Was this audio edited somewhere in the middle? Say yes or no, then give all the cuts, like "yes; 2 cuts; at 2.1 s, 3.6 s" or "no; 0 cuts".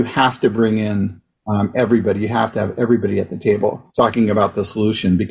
yes; 1 cut; at 3.9 s